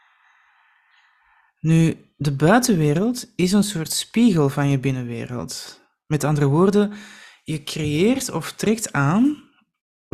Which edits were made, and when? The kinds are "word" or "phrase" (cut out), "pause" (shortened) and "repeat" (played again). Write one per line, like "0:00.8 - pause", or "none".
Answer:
none